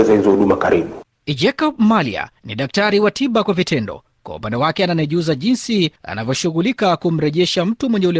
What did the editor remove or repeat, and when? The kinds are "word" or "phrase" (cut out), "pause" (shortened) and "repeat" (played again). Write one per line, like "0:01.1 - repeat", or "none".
0:02.4 - pause
0:06.0 - pause